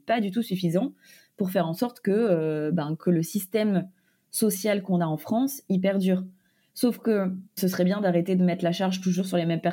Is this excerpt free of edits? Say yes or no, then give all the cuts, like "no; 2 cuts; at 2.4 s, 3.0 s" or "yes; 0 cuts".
yes; 0 cuts